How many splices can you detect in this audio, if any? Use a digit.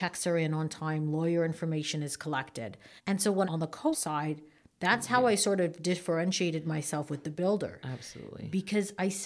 3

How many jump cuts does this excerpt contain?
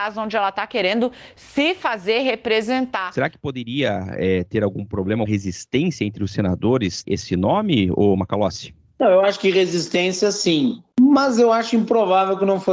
2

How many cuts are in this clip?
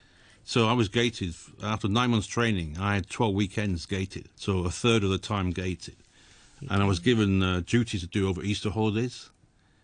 1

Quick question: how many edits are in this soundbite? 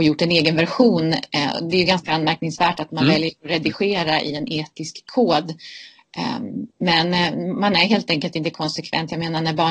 1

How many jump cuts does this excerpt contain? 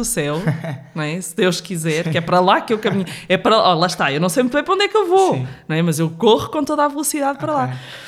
0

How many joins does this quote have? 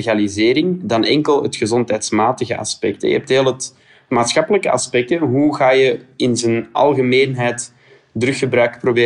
0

